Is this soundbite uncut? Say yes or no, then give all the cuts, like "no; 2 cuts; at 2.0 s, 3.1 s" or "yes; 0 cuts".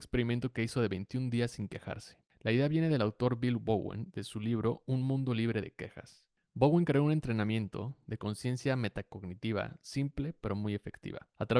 yes; 0 cuts